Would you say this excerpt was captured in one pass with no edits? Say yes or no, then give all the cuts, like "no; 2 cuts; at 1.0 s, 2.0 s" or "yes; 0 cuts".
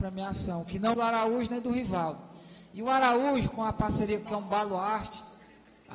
no; 2 cuts; at 0.9 s, 4.3 s